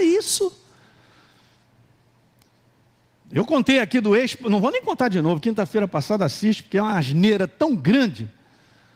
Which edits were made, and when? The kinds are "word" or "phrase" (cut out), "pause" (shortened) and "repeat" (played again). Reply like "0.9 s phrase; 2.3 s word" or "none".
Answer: none